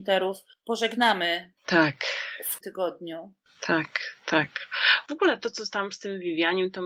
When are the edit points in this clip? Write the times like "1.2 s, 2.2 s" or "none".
2.6 s